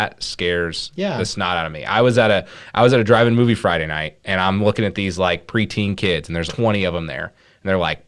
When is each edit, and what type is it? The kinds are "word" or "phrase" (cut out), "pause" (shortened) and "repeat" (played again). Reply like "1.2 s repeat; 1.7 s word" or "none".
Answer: 6.5 s word